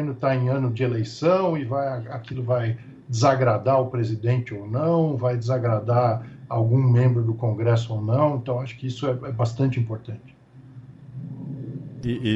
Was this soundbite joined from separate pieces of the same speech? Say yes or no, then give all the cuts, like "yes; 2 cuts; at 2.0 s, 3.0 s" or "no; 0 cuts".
no; 0 cuts